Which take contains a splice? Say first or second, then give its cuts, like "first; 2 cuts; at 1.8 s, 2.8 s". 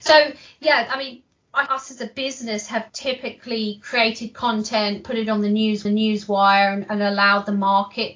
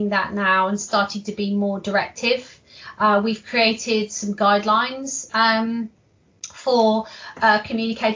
first; 3 cuts; at 1.7 s, 2.9 s, 5.8 s